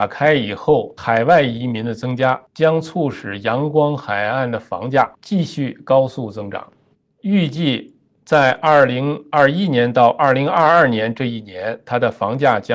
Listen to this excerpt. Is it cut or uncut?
uncut